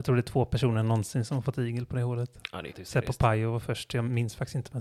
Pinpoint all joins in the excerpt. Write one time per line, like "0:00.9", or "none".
0:02.7